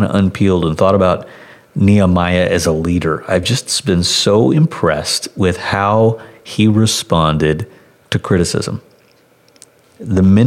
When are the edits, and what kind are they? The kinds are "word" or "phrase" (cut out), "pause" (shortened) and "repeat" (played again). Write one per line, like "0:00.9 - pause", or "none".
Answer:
none